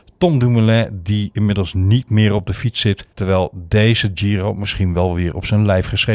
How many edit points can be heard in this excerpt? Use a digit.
1